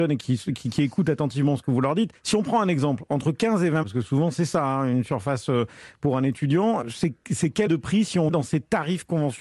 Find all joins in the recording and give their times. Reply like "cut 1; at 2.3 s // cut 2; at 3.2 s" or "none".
cut 1; at 2.2 s // cut 2; at 3.8 s // cut 3; at 6.8 s // cut 4; at 7.7 s // cut 5; at 8.3 s